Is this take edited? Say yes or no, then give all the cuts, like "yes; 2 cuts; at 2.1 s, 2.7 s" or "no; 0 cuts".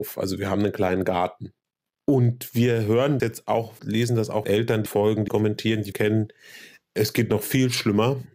yes; 6 cuts; at 3.2 s, 3.8 s, 4.4 s, 4.9 s, 5.3 s, 5.9 s